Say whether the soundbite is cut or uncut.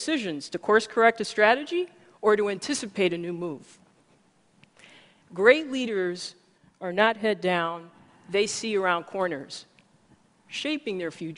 uncut